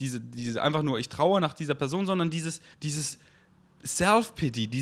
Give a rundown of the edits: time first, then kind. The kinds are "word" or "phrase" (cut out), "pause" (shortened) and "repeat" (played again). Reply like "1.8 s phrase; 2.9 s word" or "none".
2.7 s pause